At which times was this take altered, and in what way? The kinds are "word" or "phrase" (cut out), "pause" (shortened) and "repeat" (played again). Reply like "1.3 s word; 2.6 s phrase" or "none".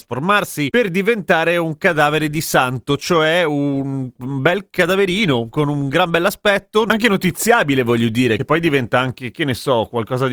none